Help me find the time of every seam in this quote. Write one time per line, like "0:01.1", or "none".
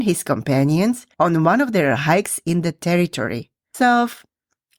none

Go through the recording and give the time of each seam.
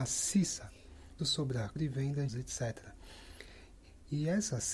0:01.2
0:01.8
0:02.3

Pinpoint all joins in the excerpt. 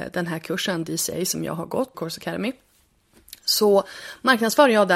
0:01.9

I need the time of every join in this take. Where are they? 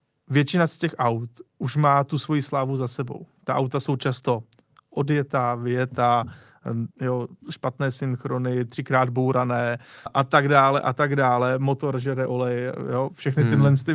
0:01.5
0:03.4
0:06.9
0:10.1

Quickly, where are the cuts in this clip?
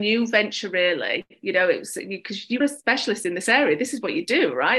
0:02.6

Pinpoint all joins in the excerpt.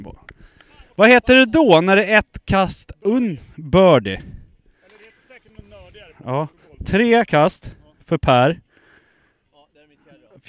none

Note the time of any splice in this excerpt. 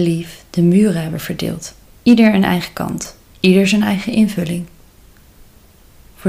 0:01.8
0:03.3

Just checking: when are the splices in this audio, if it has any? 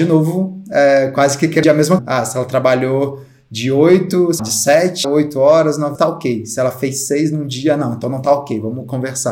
0:01.6
0:02.0
0:04.4
0:05.0
0:06.0

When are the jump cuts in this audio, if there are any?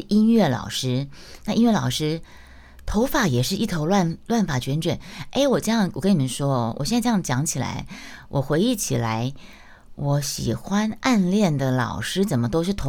none

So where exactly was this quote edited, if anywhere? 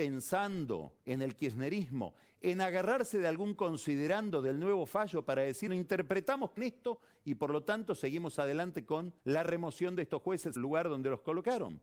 0:01.0
0:05.7
0:06.6
0:09.2
0:10.6

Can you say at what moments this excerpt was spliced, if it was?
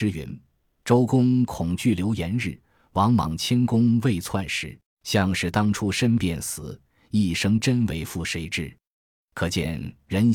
0:04.9

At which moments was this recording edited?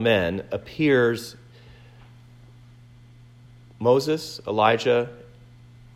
none

